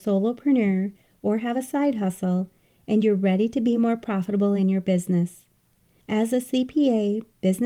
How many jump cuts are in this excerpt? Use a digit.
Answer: 0